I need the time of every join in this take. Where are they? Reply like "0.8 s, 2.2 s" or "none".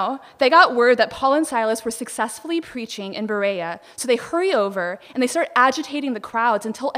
none